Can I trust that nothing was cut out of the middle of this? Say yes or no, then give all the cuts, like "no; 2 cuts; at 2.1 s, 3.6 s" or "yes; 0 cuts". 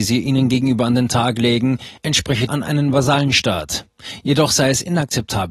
no; 1 cut; at 2.5 s